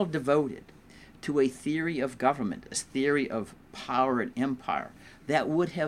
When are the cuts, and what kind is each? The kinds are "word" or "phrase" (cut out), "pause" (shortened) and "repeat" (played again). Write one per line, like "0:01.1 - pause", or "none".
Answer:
none